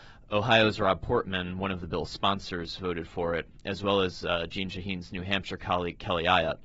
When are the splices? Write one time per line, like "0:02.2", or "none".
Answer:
none